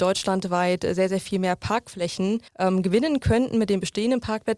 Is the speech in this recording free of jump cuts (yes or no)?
no